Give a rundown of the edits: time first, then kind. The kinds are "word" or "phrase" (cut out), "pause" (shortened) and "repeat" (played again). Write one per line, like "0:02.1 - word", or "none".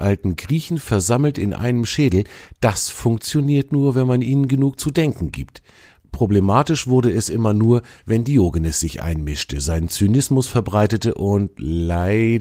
none